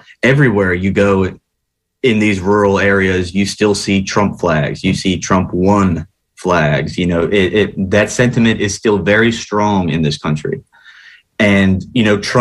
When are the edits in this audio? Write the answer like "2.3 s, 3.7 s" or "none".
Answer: none